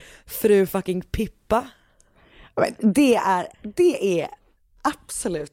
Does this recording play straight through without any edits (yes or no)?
yes